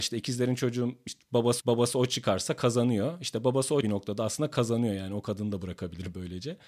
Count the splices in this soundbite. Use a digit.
2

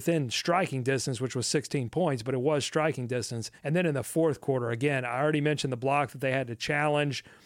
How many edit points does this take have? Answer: 1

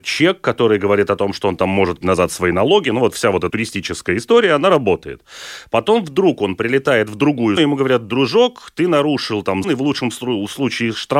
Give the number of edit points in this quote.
4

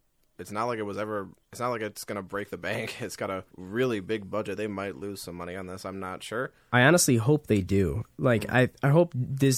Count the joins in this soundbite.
1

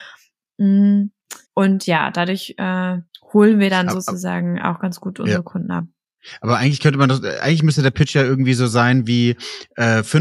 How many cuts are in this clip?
2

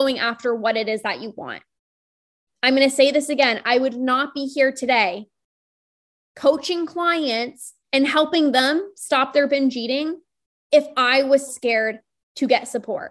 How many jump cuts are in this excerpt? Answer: 2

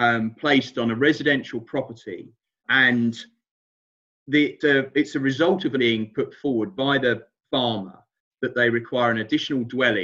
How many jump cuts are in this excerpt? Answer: 3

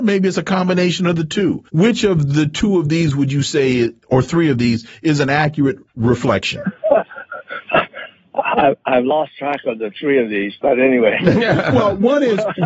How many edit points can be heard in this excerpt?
1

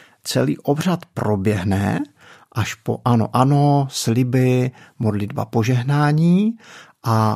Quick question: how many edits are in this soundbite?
0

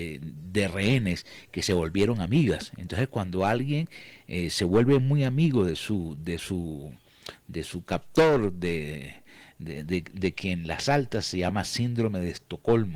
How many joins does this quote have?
0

